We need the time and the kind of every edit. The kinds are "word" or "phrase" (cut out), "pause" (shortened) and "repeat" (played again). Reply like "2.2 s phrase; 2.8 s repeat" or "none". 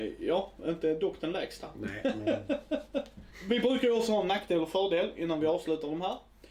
none